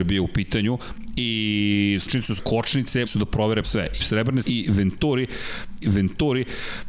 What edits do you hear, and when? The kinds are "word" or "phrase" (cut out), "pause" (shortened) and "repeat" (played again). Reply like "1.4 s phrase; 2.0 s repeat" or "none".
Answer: 2.1 s word; 2.4 s phrase; 3.1 s word; 3.6 s word; 4.0 s word; 4.4 s word; 5.8 s repeat